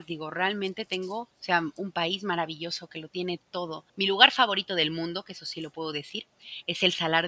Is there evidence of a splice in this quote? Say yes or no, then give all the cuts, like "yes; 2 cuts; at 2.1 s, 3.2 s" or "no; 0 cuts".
yes; 2 cuts; at 1.3 s, 3.9 s